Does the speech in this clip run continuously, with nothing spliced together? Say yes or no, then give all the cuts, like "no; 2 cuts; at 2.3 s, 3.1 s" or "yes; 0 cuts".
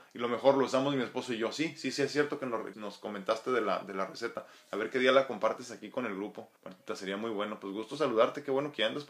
no; 2 cuts; at 2.7 s, 6.6 s